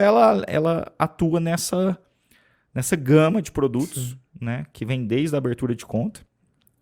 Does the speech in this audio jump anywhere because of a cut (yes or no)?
no